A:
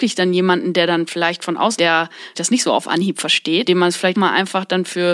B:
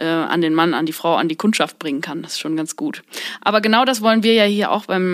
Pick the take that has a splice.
A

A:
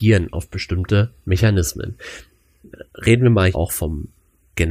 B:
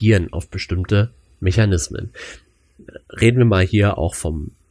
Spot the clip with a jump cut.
A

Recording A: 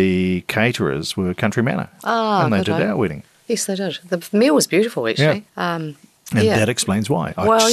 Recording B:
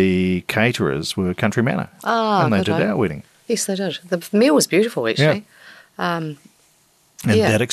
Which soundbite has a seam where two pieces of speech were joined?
A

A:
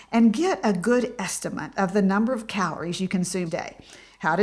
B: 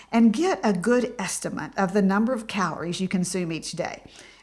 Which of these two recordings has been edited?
A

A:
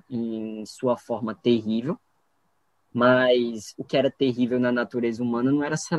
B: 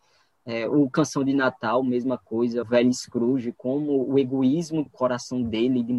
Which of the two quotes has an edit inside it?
B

